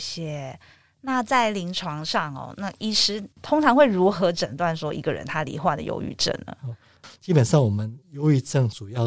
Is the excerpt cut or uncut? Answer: cut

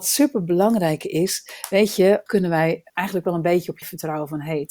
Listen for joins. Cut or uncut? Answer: cut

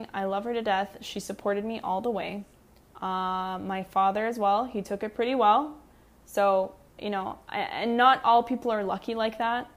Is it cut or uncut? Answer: uncut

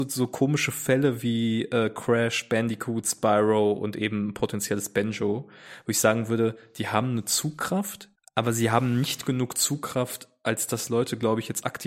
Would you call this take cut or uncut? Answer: cut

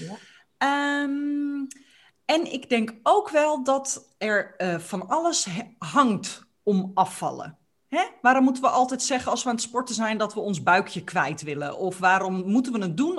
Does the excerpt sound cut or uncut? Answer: uncut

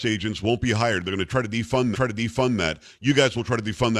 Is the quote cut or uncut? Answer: cut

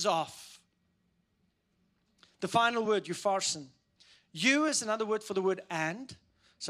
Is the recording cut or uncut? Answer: uncut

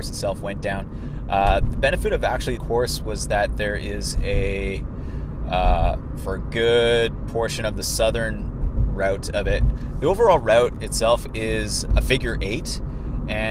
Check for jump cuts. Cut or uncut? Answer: cut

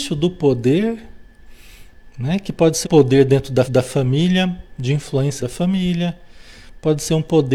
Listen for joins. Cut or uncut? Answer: cut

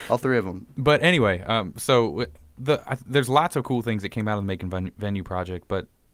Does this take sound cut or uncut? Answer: uncut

